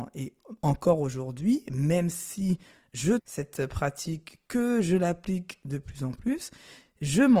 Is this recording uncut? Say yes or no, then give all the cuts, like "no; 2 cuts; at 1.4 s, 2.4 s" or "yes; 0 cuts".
no; 1 cut; at 3.2 s